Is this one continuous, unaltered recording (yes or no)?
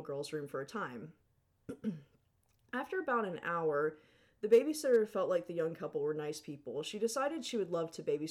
yes